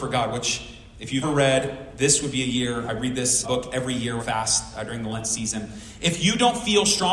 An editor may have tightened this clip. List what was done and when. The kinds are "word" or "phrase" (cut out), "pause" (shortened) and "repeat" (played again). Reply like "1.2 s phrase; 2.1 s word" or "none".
1.2 s word; 3.4 s word; 4.2 s word